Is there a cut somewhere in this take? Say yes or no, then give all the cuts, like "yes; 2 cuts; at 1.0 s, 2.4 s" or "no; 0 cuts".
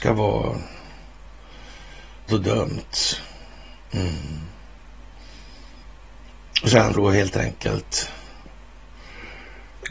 yes; 2 cuts; at 2.3 s, 6.9 s